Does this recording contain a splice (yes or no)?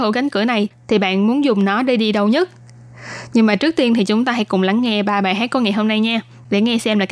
no